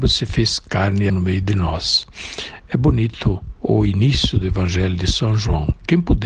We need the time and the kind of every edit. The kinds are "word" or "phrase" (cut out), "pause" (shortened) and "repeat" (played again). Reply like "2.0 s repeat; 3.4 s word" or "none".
1.1 s word